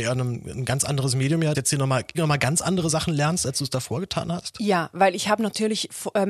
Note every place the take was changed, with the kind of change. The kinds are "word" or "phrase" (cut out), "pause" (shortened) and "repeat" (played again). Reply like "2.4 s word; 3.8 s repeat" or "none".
1.5 s phrase; 2.1 s word